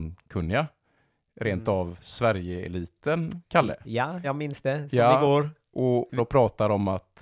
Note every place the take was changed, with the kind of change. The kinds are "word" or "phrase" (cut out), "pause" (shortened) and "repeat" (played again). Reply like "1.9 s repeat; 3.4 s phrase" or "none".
4.2 s phrase; 6.2 s phrase